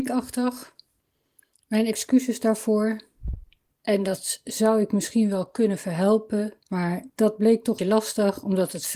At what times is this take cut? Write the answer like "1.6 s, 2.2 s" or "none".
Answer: 7.8 s

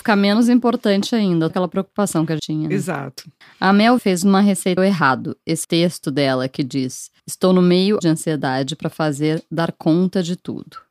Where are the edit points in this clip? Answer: 1.5 s, 2.4 s, 3.4 s, 4.0 s, 4.8 s, 5.6 s, 7.2 s, 8.0 s

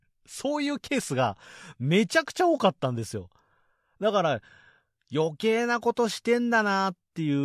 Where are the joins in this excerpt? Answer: none

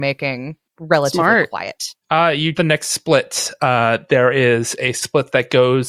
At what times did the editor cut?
2.5 s

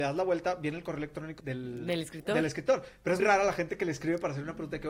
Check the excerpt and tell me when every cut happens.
1.4 s, 3.2 s

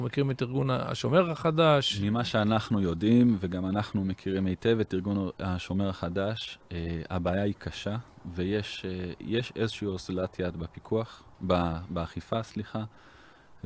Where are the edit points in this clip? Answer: none

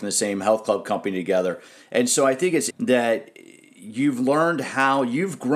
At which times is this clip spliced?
2.7 s

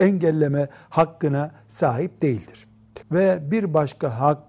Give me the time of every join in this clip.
3.0 s

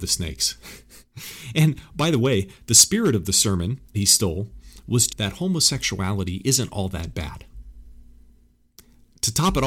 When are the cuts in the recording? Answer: 1.0 s, 3.9 s, 5.1 s

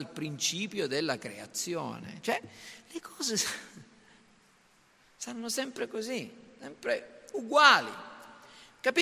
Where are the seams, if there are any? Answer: none

